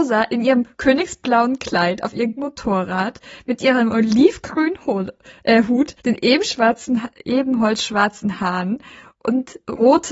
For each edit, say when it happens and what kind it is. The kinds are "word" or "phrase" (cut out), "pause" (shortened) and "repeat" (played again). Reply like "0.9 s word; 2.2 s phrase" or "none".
2.4 s word; 6.0 s pause